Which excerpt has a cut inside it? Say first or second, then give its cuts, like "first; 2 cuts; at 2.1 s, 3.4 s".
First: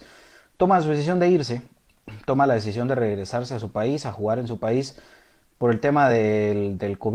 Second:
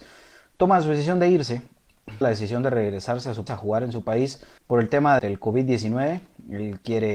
second; 4 cuts; at 2.2 s, 3.5 s, 4.6 s, 5.2 s